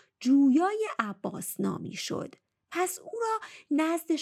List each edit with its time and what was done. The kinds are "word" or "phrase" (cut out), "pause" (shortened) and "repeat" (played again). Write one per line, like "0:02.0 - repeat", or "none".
none

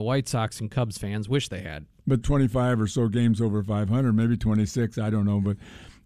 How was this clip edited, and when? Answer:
0:02.2 - phrase

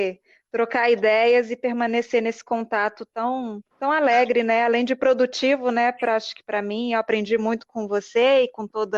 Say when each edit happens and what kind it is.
0:03.7 - pause

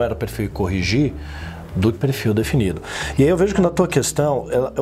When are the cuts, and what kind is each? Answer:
0:01.9 - phrase

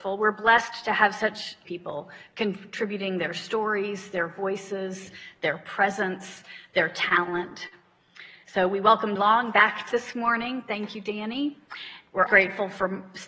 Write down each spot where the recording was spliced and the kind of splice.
0:01.6 - phrase
0:09.2 - word
0:09.9 - phrase
0:12.3 - word

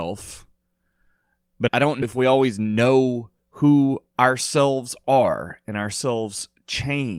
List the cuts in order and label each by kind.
0:01.7 - word
0:02.0 - word
0:03.4 - pause

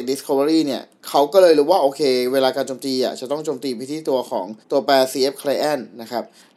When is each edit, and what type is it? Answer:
0:04.6 - pause

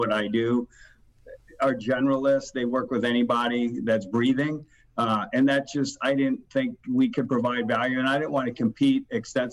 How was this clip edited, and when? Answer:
none

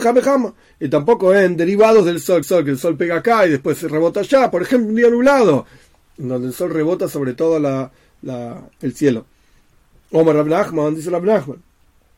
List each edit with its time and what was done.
0:02.4 - repeat

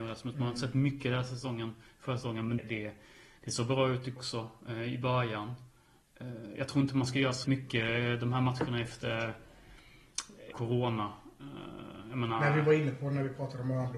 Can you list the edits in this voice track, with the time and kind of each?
0:02.6 - word
0:04.2 - word
0:07.4 - word
0:10.5 - word

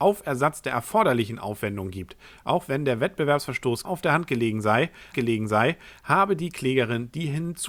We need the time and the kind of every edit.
0:03.8 - word
0:05.1 - repeat

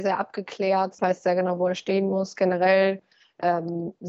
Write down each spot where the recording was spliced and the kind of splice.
0:01.0 - word

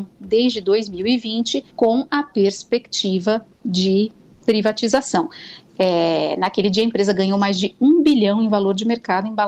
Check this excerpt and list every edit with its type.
0:01.7 - pause
0:03.5 - pause

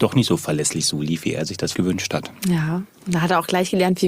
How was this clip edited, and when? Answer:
0:01.7 - word

